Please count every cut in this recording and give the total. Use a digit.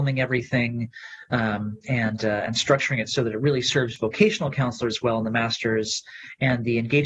0